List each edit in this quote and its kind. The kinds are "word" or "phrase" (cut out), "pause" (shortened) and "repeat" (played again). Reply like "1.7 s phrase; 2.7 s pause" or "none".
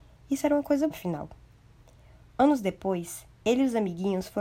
0.9 s word